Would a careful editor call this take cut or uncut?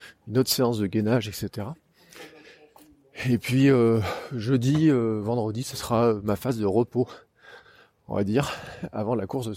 uncut